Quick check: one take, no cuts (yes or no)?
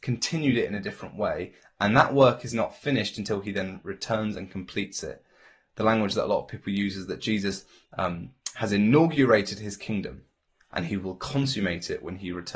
yes